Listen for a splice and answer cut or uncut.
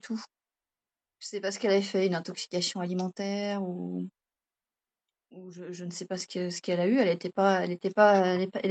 uncut